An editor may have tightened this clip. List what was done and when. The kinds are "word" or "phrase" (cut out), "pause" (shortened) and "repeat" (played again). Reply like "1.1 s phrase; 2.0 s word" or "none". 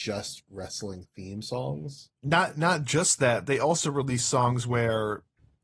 2.2 s pause